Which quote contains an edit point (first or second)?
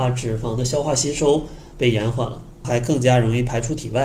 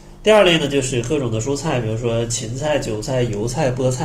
first